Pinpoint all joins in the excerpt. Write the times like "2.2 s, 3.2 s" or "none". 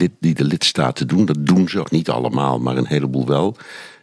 1.8 s